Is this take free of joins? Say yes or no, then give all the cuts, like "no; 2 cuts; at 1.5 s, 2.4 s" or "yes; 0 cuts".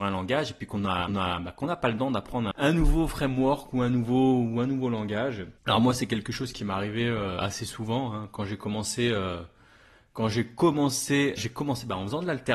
no; 4 cuts; at 1.1 s, 2.5 s, 5.6 s, 11.4 s